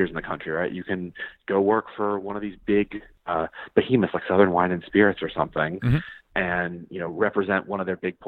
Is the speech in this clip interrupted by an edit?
no; 0 cuts

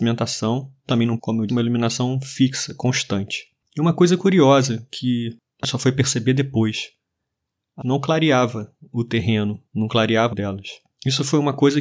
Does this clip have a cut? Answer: yes; 6 cuts; at 1.2 s, 1.5 s, 5.6 s, 7.8 s, 9.7 s, 10.3 s

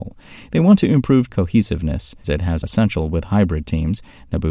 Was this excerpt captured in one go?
no; 3 cuts; at 1.3 s, 2.2 s, 2.6 s

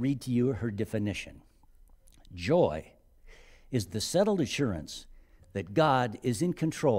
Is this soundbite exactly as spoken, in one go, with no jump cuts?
yes; 0 cuts

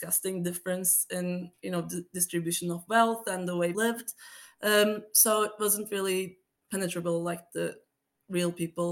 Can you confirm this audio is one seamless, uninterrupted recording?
no; 2 cuts; at 3.7 s, 6.6 s

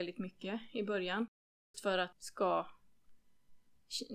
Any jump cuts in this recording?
yes; 2 cuts; at 1.7 s, 2.1 s

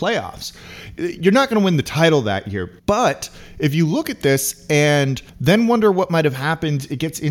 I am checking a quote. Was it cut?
yes; 2 cuts; at 2.8 s, 5.3 s

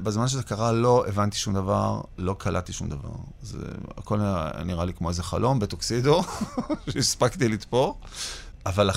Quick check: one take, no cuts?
yes; 0 cuts

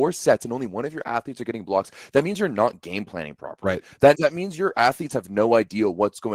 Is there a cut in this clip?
yes; 1 cut; at 4.1 s

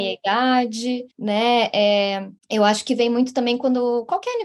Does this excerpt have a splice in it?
yes; 2 cuts; at 1.1 s, 2.4 s

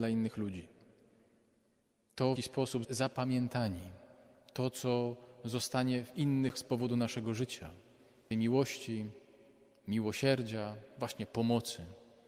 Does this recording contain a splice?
yes; 4 cuts; at 2.4 s, 2.8 s, 6.5 s, 8.3 s

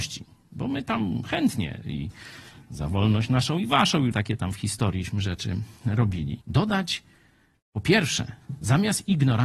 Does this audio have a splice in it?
yes; 2 cuts; at 4.1 s, 6.4 s

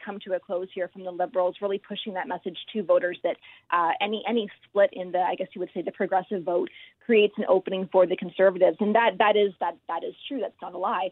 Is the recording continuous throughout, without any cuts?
yes; 0 cuts

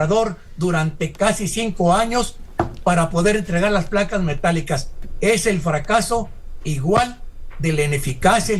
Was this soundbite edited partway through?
no; 0 cuts

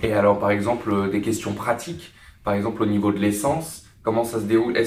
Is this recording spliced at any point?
no; 0 cuts

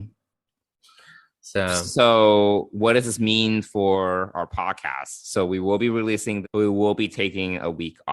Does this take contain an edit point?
yes; 1 cut; at 6.4 s

